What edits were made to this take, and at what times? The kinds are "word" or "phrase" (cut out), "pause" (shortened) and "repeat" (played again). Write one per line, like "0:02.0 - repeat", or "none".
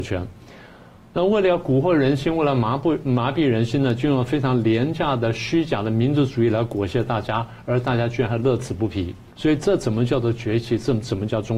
0:09.3 - pause